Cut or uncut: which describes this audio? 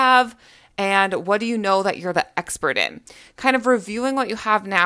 uncut